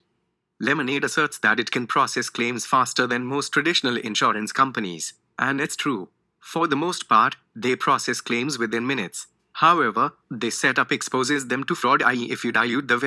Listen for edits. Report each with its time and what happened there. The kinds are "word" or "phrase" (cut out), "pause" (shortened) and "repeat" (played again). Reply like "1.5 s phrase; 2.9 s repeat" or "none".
none